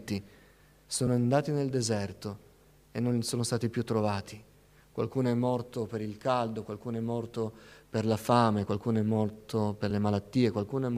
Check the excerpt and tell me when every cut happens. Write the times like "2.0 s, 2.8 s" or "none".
none